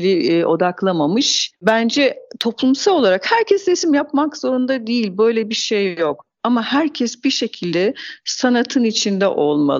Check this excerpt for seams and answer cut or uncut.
uncut